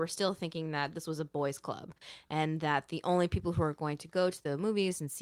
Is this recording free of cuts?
yes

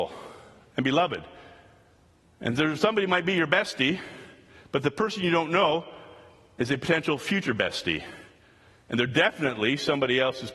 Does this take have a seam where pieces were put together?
no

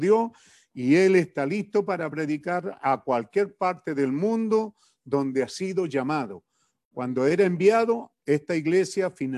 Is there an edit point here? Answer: no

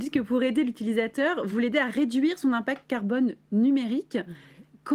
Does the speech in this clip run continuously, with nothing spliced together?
yes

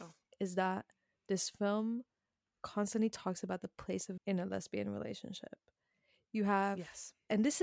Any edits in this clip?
yes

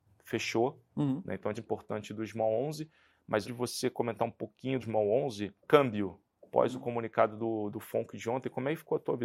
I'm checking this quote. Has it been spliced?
yes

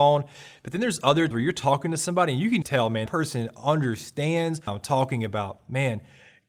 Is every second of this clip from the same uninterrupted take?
no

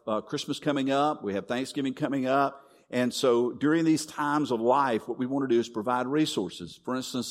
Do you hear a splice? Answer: no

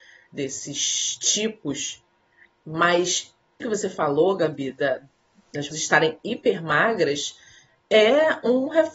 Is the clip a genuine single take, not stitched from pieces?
no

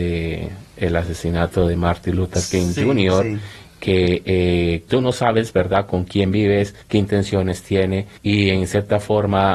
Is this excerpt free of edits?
no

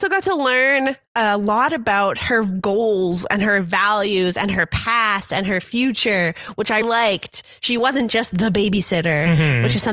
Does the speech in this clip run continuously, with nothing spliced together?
no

